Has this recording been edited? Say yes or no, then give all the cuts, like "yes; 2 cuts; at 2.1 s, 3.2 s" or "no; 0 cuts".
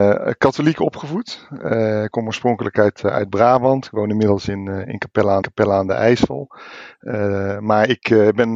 yes; 1 cut; at 5.4 s